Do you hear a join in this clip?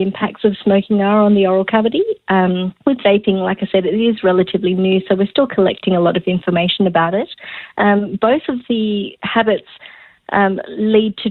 yes; 1 cut; at 2.8 s

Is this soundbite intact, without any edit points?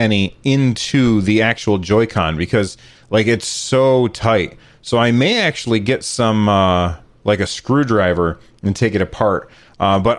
yes; 0 cuts

